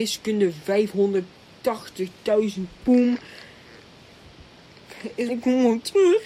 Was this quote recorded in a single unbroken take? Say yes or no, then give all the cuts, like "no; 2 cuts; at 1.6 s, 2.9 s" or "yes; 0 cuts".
no; 2 cuts; at 2.8 s, 5.3 s